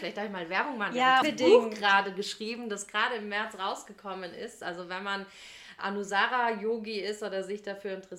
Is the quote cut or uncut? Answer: cut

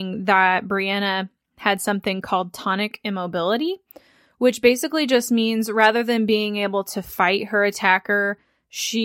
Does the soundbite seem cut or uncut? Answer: uncut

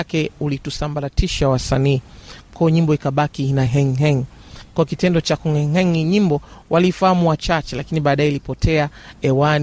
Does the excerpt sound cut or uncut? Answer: uncut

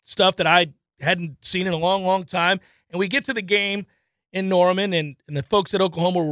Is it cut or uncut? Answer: uncut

